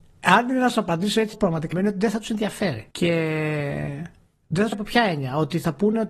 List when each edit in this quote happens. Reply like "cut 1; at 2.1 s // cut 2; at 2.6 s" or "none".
cut 1; at 1.3 s // cut 2; at 1.7 s // cut 3; at 2.9 s // cut 4; at 4.7 s